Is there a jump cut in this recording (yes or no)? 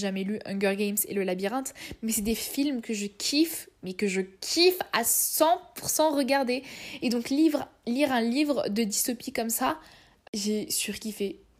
no